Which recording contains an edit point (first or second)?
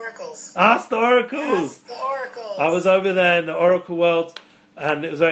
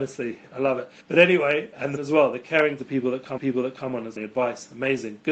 second